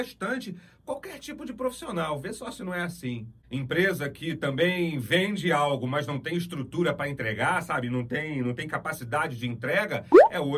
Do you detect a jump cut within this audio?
no; 0 cuts

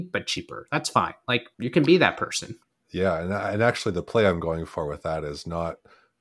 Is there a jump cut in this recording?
yes; 2 cuts; at 1.5 s, 2.6 s

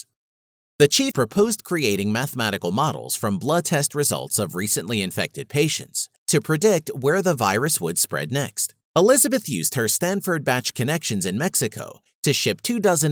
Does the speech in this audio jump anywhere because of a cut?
yes; 3 cuts; at 1.1 s, 6.2 s, 8.8 s

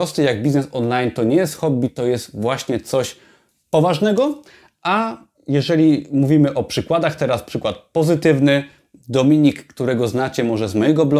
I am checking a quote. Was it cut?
no; 0 cuts

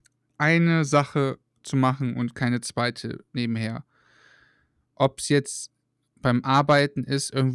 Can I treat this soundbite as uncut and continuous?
yes; 0 cuts

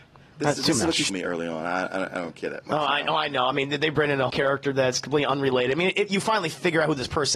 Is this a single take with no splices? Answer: no; 2 cuts; at 1.1 s, 4.3 s

